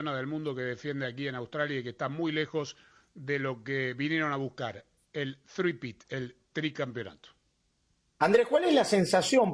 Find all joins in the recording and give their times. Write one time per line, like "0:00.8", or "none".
none